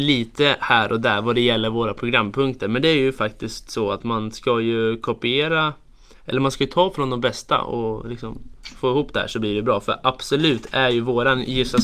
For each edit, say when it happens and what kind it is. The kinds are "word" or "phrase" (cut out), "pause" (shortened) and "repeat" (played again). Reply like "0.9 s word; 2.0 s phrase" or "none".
none